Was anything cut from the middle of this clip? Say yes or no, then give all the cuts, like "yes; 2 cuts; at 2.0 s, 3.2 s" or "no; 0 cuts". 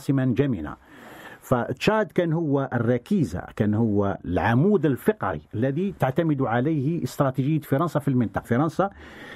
yes; 1 cut; at 8.4 s